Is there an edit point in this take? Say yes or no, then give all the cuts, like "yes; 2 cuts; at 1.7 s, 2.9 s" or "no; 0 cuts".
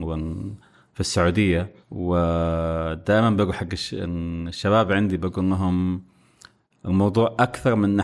yes; 1 cut; at 1.8 s